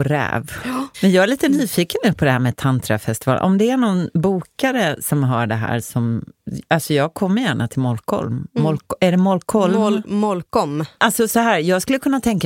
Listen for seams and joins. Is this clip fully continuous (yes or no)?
yes